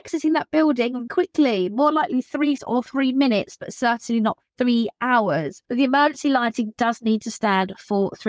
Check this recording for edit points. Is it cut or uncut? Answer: cut